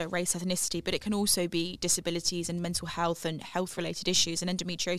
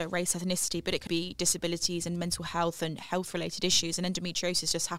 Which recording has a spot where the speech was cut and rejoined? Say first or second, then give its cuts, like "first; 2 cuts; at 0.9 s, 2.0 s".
second; 1 cut; at 1.1 s